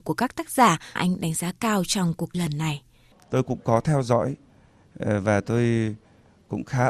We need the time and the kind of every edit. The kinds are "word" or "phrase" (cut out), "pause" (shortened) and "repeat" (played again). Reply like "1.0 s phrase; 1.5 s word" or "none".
1.0 s word; 2.3 s word